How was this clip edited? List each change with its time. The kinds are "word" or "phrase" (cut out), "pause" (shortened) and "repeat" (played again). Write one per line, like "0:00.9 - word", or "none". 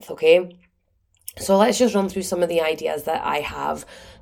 none